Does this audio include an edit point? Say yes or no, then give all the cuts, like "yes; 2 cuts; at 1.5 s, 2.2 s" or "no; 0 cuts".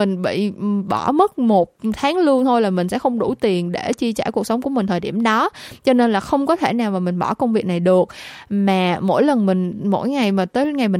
no; 0 cuts